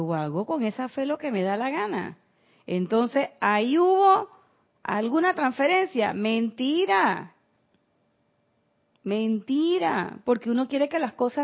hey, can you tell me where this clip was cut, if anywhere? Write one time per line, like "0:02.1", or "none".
none